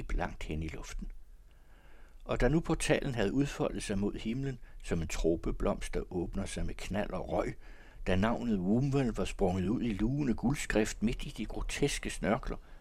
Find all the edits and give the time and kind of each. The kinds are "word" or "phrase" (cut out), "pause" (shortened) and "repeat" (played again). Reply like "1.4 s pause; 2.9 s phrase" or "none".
none

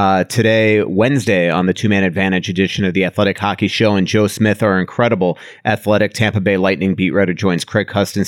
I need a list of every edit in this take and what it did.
none

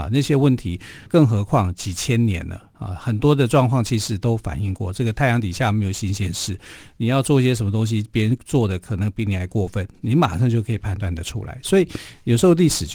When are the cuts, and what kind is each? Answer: 1.1 s word; 2.7 s pause

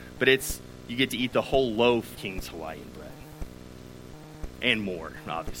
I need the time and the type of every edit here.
2.2 s word

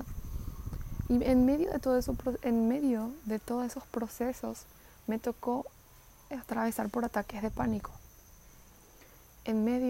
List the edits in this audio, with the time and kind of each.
none

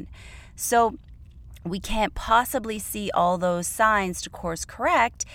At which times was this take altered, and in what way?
none

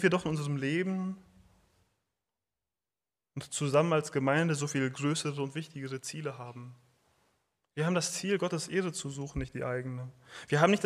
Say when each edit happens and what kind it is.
none

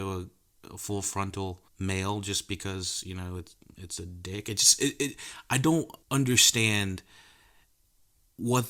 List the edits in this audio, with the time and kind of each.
1.7 s pause; 6.0 s pause

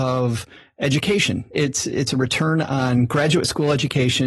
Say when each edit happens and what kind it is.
none

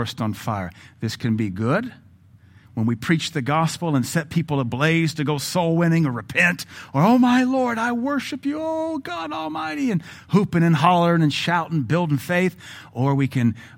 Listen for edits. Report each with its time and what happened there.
none

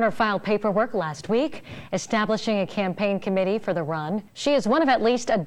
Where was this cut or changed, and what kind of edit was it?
4.3 s pause

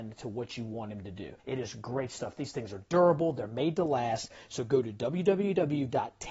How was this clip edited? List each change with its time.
1.4 s pause

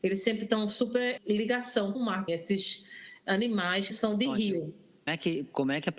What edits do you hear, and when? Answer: 1.2 s word; 1.9 s word; 2.3 s word; 3.9 s word; 5.1 s word

